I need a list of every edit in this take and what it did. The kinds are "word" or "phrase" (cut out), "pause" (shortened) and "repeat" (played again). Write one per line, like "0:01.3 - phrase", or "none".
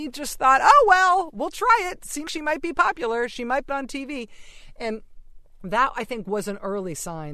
0:02.3 - word
0:03.7 - word